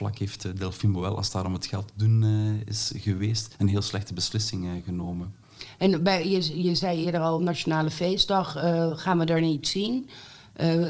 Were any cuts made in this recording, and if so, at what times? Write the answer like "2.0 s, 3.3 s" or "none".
none